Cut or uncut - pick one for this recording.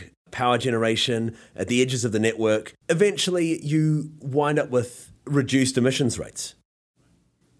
cut